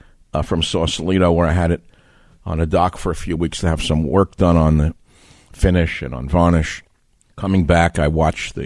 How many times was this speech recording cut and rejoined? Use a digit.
0